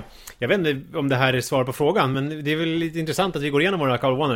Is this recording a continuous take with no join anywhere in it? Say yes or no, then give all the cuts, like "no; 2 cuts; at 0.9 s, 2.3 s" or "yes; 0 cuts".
yes; 0 cuts